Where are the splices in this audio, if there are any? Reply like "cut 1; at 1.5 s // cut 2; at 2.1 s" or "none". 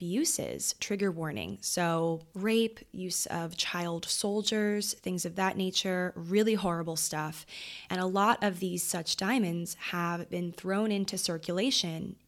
cut 1; at 2.3 s